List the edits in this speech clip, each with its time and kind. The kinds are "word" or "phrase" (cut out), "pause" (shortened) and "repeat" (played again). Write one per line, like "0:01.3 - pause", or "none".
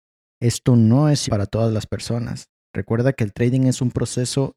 0:01.3 - word